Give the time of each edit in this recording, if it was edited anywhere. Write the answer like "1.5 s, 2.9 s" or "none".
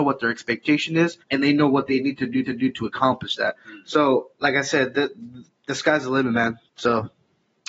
1.2 s, 2.5 s